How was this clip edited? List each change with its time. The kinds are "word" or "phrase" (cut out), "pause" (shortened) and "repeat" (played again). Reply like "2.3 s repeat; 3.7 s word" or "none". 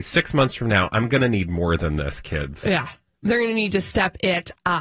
none